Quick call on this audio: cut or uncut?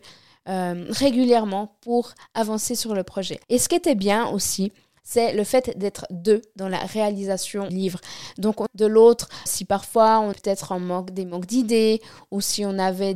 cut